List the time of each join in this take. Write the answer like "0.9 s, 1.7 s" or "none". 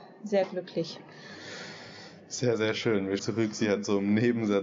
3.2 s

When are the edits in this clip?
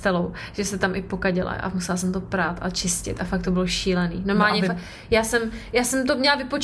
none

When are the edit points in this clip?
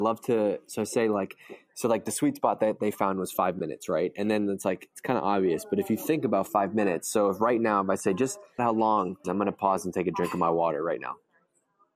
8.6 s, 9.2 s

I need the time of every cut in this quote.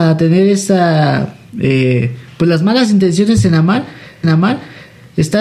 4.2 s

